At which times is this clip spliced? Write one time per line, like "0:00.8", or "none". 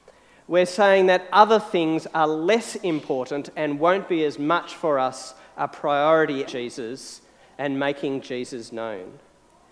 0:06.5